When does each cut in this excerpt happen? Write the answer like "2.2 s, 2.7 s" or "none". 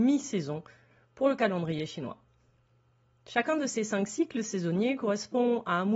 none